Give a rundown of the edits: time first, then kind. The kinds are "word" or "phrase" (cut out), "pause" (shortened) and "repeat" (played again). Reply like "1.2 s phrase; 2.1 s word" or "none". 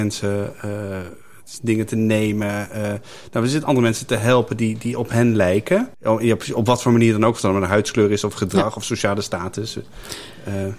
5.9 s pause